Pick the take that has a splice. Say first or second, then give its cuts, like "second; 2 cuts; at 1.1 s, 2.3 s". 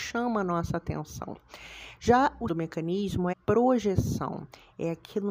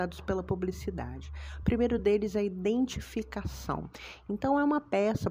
first; 2 cuts; at 2.5 s, 3.3 s